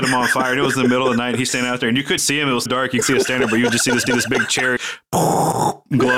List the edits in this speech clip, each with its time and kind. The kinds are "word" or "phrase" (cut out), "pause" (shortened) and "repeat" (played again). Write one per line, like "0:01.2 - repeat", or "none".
0:02.2 - word
0:02.7 - word
0:03.0 - word
0:04.1 - repeat
0:04.8 - word